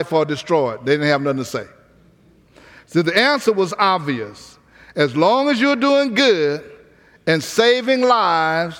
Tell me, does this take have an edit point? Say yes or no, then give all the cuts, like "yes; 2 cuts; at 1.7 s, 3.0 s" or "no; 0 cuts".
no; 0 cuts